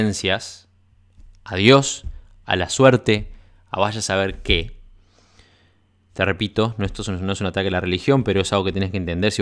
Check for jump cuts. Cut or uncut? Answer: uncut